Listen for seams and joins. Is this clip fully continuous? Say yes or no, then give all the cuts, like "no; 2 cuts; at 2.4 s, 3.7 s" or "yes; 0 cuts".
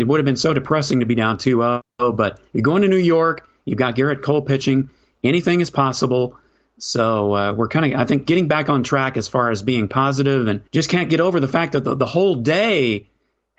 no; 2 cuts; at 2.5 s, 10.7 s